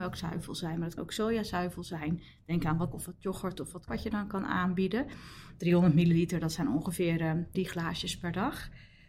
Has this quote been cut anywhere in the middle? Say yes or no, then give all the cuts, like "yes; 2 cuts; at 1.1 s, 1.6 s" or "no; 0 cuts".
yes; 4 cuts; at 1.0 s, 2.9 s, 3.9 s, 7.5 s